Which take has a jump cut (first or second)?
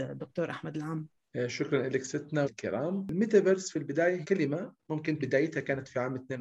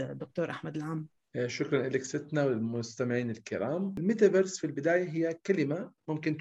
first